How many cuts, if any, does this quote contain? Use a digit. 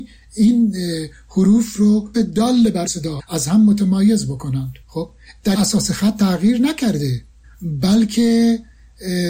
6